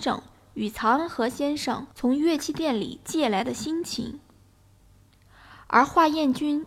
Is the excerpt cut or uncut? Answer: cut